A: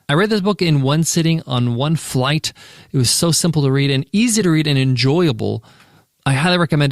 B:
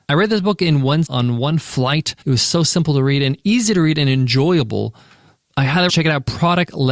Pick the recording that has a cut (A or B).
B